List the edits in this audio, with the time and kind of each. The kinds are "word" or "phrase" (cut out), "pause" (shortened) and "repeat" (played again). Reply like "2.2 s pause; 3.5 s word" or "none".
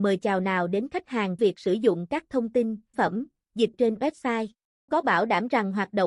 1.4 s word; 2.9 s word; 3.7 s word; 4.9 s word